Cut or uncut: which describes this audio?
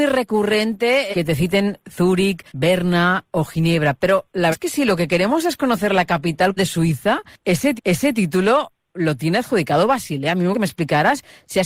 cut